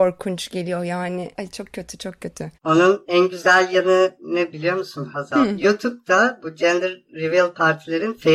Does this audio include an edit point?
yes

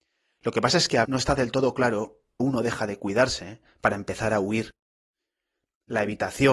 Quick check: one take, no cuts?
no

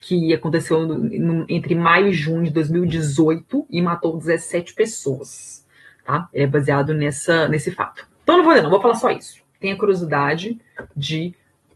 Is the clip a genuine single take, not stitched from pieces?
yes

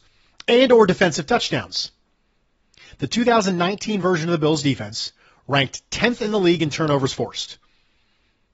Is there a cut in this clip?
no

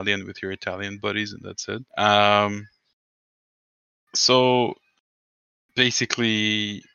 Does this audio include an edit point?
yes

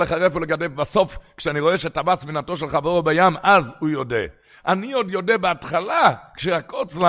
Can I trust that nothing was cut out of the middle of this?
yes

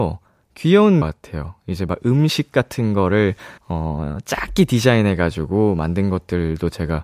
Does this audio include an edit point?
yes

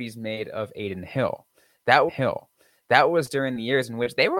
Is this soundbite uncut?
no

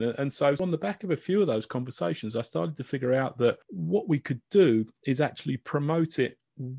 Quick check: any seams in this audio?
no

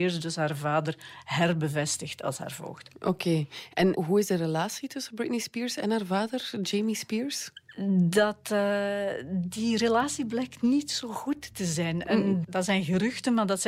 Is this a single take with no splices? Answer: no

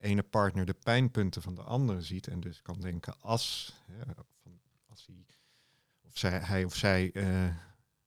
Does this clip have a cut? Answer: no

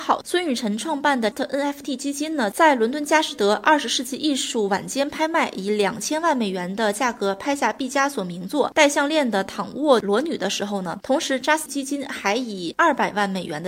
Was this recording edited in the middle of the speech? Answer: yes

